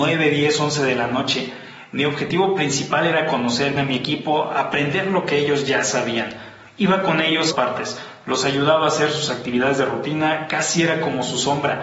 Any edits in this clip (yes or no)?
yes